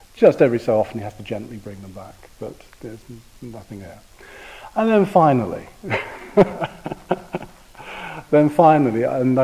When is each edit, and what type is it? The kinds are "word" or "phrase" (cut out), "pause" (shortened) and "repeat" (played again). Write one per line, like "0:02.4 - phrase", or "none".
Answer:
none